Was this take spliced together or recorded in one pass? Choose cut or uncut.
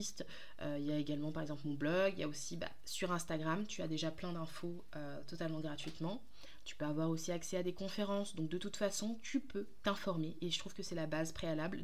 uncut